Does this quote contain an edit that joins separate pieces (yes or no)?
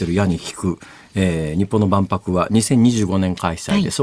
no